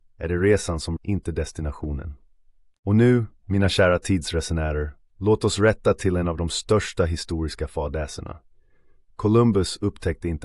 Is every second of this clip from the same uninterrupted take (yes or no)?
no